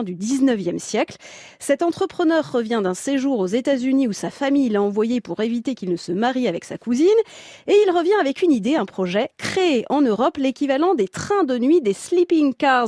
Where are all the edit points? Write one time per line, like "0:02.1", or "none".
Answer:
none